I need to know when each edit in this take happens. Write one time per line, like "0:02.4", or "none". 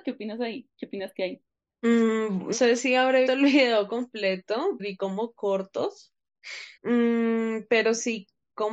0:02.5
0:03.3
0:04.8
0:06.8